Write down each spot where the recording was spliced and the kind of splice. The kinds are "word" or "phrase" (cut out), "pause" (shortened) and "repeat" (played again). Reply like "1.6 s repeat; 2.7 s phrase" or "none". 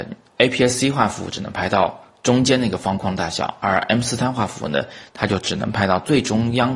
none